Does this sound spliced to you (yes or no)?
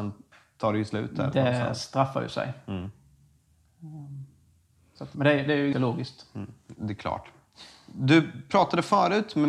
yes